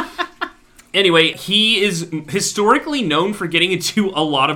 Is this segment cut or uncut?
uncut